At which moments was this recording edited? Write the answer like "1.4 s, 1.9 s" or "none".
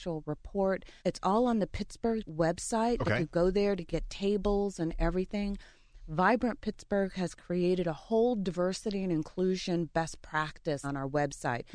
1.0 s, 2.3 s, 10.8 s